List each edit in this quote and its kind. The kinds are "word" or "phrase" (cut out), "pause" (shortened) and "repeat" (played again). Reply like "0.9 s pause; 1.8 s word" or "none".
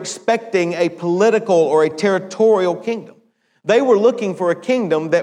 none